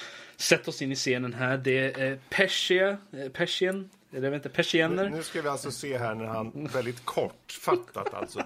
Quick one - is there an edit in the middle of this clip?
no; 0 cuts

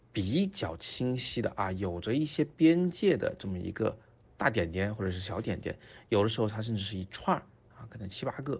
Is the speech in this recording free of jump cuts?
yes; 0 cuts

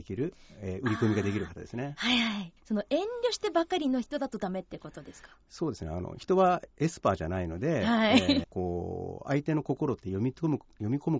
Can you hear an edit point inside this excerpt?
yes; 2 cuts; at 2.6 s, 8.4 s

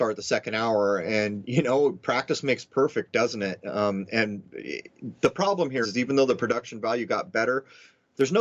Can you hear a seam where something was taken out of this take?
yes; 1 cut; at 5.8 s

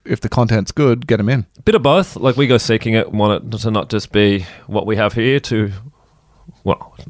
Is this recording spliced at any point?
yes; 1 cut; at 3.1 s

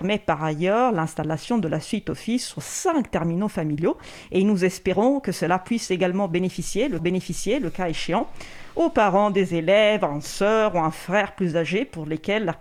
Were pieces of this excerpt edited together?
yes; 1 cut; at 7.0 s

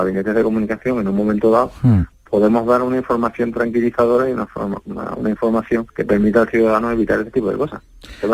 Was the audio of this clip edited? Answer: yes; 1 cut; at 5.9 s

